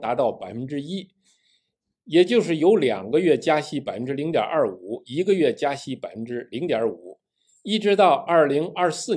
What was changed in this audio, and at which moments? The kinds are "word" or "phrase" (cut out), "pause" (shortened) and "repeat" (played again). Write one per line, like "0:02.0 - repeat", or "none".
none